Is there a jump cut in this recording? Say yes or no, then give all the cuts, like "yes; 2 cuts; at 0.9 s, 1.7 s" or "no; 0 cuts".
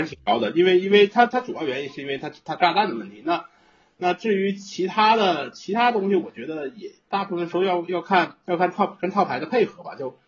no; 0 cuts